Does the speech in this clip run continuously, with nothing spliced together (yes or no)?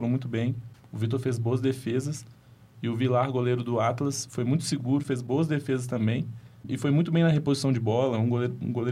yes